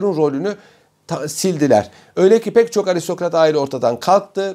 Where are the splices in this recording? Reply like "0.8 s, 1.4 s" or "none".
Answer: none